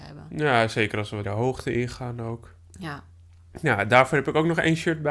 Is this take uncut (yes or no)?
no